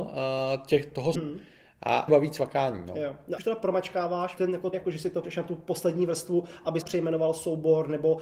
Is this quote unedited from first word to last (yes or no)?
no